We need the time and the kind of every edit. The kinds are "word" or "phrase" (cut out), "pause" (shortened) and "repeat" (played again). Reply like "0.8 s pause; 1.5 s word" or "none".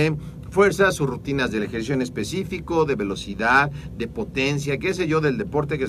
none